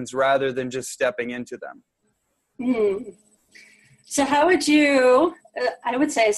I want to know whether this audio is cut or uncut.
uncut